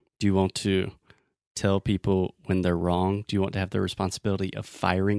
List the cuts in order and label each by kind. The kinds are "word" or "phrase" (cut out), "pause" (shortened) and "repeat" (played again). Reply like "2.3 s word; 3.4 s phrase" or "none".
none

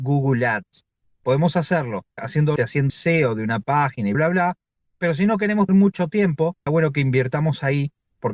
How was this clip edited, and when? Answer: 2.2 s word; 2.6 s word; 2.9 s word; 4.1 s word; 5.7 s word; 6.7 s word

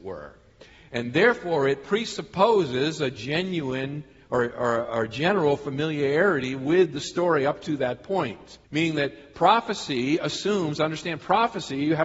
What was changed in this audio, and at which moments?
8.6 s pause

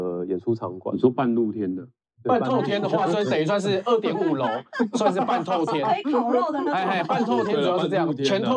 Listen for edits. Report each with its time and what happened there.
2.1 s pause

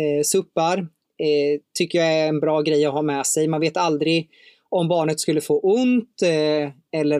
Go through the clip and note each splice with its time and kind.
none

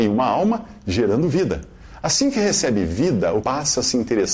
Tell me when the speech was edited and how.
3.4 s word

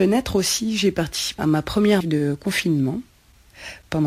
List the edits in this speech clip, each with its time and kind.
1.4 s word; 2.0 s word

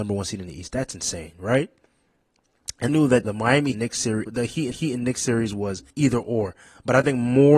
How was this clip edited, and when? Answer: 2.9 s phrase; 3.2 s phrase; 3.7 s phrase; 4.3 s word; 4.7 s repeat; 5.9 s pause

